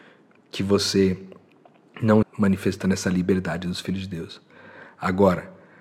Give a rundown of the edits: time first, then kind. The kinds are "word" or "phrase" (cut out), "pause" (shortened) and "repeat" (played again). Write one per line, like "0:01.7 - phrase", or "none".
0:02.2 - word